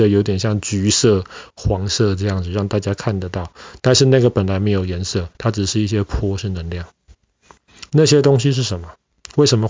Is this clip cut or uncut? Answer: cut